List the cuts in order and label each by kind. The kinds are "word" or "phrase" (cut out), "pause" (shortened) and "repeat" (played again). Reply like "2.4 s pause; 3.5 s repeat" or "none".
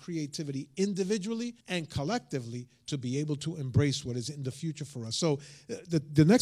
1.6 s pause